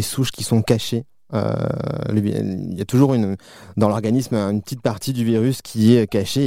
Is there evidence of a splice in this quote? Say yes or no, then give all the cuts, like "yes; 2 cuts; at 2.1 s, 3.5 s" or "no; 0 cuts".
no; 0 cuts